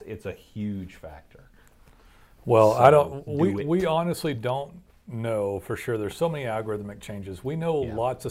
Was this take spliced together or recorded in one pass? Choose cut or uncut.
uncut